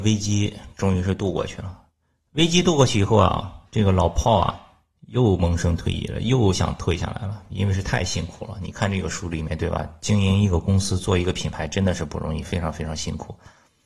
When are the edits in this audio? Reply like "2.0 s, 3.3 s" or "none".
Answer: none